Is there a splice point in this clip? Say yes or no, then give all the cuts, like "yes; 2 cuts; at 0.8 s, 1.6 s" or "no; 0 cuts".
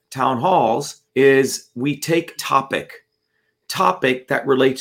yes; 3 cuts; at 1.1 s, 2.4 s, 3.6 s